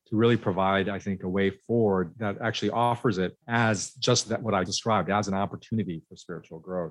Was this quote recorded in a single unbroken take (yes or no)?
no